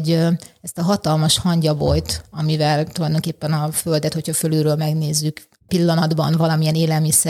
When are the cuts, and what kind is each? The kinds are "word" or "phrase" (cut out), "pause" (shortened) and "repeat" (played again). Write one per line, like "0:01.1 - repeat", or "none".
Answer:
0:05.7 - word